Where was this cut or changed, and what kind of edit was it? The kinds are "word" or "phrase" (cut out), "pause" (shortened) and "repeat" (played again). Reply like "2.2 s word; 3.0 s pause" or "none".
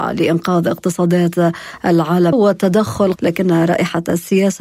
2.3 s word; 3.2 s phrase